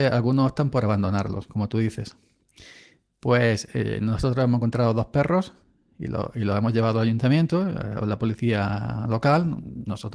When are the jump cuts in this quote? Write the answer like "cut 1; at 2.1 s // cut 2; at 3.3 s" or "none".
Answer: none